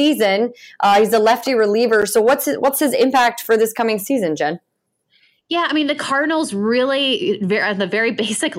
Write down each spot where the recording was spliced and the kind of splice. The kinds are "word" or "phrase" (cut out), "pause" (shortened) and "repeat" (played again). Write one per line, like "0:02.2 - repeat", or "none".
none